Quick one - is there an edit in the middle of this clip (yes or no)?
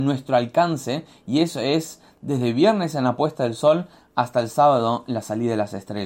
no